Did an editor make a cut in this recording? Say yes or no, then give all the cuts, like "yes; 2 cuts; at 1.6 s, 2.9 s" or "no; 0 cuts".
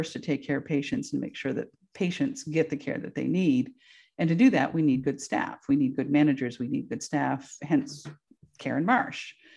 no; 0 cuts